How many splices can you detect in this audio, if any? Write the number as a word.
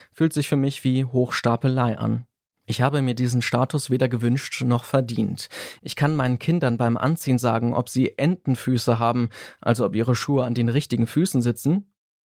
zero